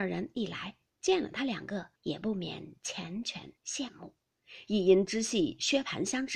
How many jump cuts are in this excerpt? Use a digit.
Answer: 2